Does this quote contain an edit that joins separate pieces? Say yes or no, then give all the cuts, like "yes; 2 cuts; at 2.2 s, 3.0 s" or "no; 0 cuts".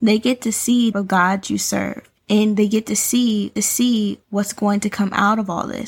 yes; 4 cuts; at 0.9 s, 1.4 s, 2.2 s, 3.6 s